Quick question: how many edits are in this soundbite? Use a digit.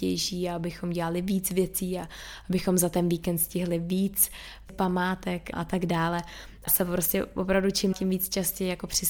4